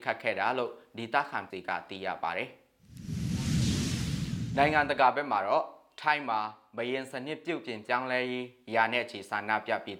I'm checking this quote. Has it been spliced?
yes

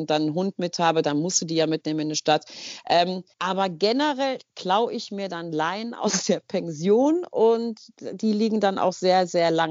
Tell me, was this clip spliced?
yes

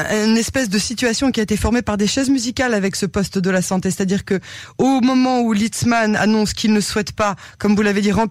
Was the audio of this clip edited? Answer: no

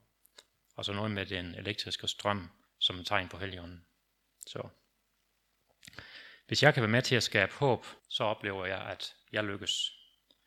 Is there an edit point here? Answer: yes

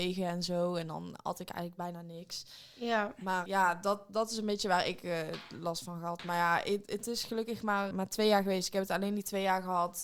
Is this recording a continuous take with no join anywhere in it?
no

